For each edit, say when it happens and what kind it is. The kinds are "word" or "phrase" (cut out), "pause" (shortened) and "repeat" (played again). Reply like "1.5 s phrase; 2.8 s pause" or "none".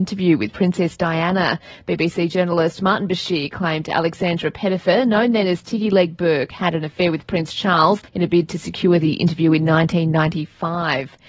8.1 s pause